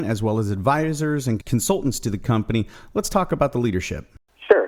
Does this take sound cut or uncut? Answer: uncut